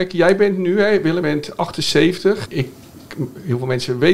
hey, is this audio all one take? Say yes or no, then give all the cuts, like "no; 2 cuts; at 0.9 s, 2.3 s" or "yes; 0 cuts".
no; 2 cuts; at 1.2 s, 2.4 s